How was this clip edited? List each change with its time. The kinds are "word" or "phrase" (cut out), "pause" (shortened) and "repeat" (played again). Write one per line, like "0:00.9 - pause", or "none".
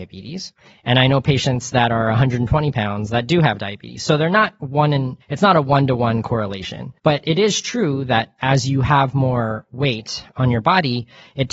0:05.2 - pause
0:07.0 - pause